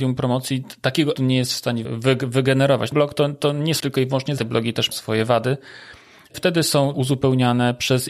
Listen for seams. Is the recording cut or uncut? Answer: cut